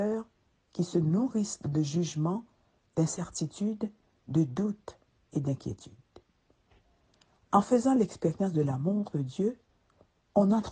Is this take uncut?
yes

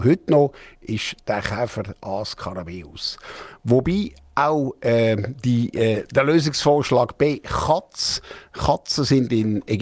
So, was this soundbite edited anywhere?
no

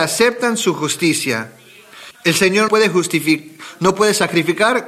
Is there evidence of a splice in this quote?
yes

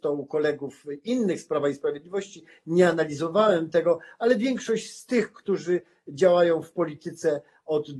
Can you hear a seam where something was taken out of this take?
no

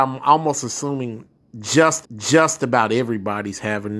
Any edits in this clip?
yes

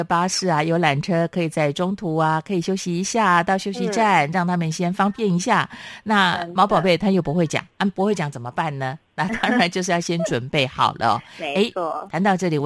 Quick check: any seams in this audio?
no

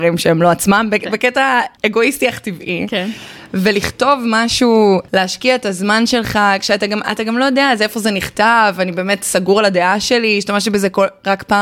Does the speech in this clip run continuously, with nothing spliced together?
yes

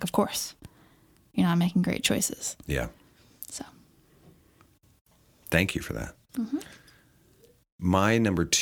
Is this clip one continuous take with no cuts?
yes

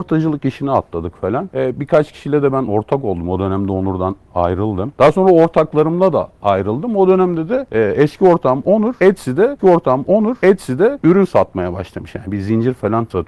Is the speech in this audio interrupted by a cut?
yes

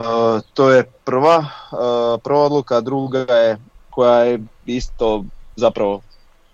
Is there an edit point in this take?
yes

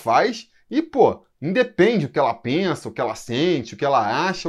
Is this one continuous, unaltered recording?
yes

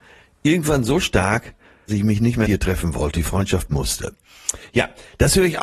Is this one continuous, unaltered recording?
no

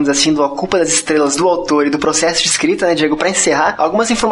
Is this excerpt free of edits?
yes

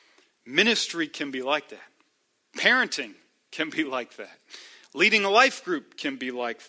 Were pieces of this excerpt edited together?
no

